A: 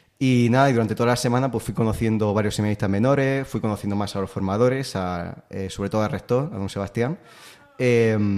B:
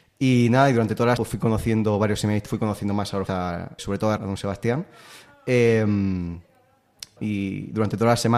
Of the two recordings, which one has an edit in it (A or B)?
B